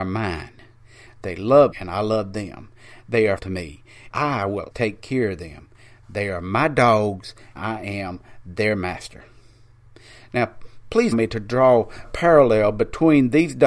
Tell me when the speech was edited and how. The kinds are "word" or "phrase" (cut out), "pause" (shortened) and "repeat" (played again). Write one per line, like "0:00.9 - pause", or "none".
0:01.7 - word
0:03.4 - word
0:04.1 - word
0:04.7 - word
0:07.6 - word
0:11.1 - word
0:12.0 - word

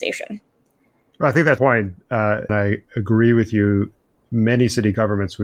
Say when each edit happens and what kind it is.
0:01.6 - phrase
0:02.5 - word

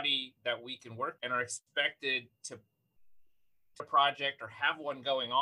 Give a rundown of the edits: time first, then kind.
0:01.2 - word
0:03.8 - word

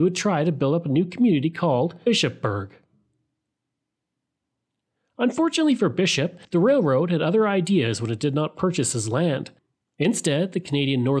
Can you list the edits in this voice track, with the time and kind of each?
0:06.4 - pause

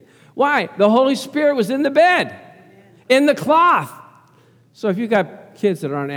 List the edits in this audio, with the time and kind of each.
none

